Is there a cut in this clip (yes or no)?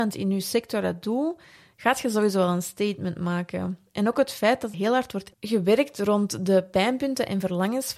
yes